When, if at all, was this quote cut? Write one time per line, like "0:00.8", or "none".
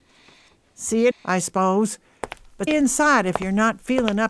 0:01.1
0:02.7